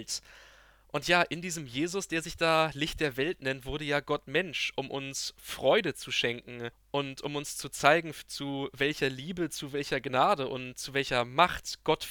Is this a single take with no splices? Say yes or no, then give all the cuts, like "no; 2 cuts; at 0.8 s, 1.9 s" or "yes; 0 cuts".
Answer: no; 1 cut; at 6.7 s